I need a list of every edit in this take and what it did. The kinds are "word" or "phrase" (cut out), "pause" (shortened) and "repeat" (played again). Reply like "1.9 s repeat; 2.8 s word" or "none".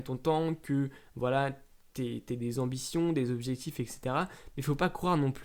none